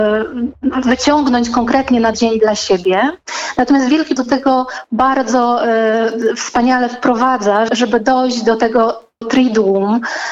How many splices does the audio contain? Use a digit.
4